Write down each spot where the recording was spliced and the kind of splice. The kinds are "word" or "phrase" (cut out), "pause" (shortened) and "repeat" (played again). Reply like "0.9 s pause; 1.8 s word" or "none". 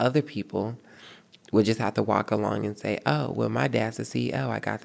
none